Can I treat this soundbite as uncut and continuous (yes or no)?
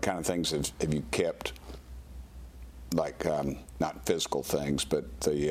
yes